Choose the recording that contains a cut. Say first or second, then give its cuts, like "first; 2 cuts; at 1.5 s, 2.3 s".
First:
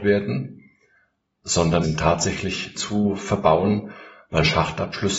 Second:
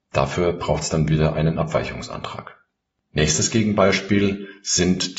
first; 2 cuts; at 1.8 s, 2.8 s